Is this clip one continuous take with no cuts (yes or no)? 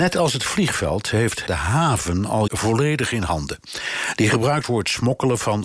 no